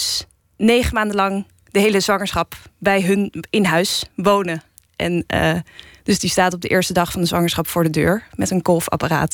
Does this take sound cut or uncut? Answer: uncut